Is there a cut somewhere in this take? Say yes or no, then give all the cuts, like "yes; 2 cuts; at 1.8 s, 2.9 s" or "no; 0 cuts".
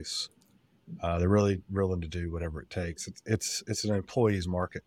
no; 0 cuts